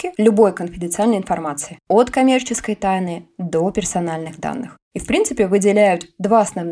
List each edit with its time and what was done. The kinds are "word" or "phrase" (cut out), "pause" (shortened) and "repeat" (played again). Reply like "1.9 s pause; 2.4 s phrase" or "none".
none